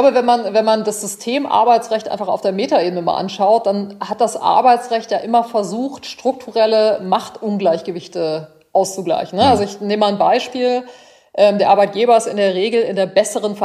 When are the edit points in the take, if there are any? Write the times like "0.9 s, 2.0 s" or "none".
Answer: none